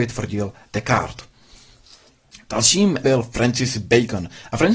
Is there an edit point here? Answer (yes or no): yes